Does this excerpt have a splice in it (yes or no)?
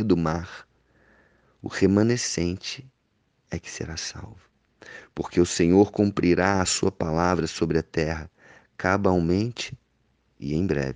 no